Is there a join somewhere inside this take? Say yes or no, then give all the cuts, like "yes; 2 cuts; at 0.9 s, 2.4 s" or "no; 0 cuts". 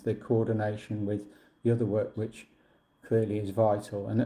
yes; 1 cut; at 2.1 s